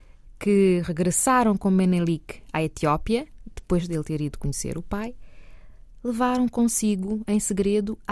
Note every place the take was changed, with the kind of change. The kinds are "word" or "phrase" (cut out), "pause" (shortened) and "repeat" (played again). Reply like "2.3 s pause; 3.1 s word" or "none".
none

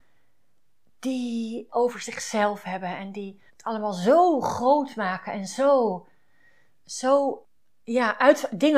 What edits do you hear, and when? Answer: 1.7 s phrase; 3.5 s pause

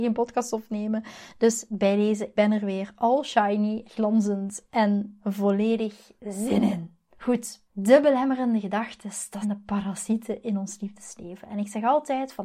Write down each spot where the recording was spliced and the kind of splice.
2.4 s word; 3.8 s word; 6.2 s pause; 7.7 s pause; 9.4 s word

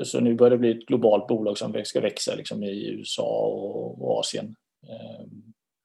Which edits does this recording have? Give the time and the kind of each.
none

